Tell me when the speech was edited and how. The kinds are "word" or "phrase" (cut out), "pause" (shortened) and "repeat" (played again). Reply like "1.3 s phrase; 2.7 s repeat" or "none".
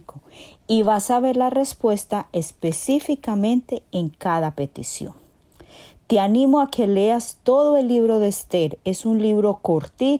none